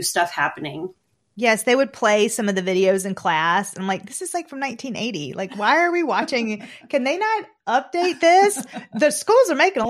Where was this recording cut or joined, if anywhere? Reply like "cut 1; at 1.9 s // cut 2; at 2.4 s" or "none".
none